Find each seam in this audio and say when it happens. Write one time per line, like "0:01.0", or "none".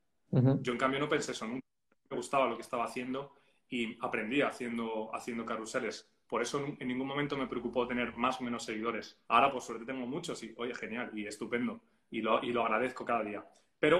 0:09.2